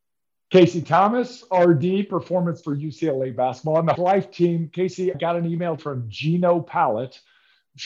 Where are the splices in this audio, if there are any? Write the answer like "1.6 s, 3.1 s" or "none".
2.6 s, 4.0 s, 5.1 s, 5.8 s